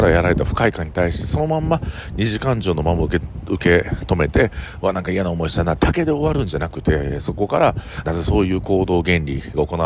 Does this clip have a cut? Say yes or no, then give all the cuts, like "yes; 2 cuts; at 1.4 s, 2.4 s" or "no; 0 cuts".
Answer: yes; 1 cut; at 8.0 s